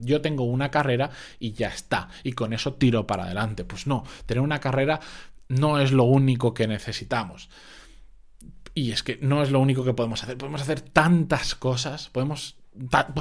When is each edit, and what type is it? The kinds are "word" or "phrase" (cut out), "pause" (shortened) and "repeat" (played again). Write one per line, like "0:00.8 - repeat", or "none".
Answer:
none